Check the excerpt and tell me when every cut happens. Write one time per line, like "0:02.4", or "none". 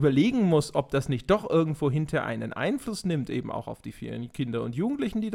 none